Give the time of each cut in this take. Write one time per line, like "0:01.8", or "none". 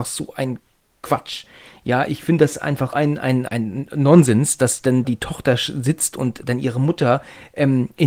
0:02.9
0:03.5
0:05.0